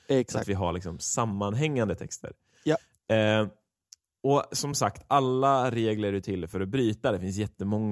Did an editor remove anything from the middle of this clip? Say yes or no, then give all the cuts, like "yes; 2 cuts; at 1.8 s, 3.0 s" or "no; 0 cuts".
no; 0 cuts